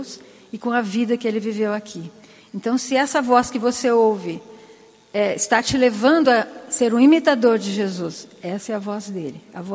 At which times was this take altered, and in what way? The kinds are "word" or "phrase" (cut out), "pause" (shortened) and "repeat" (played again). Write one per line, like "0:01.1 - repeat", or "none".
none